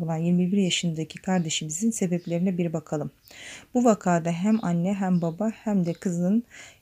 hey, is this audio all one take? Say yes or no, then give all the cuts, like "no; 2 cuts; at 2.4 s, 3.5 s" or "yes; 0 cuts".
yes; 0 cuts